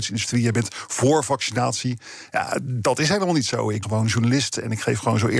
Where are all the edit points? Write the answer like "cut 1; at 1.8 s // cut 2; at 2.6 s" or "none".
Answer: cut 1; at 3.8 s

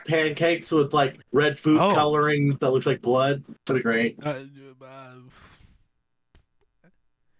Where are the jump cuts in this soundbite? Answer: cut 1; at 1.2 s // cut 2; at 2.6 s // cut 3; at 3.6 s

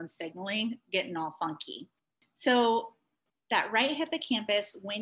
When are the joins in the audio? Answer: none

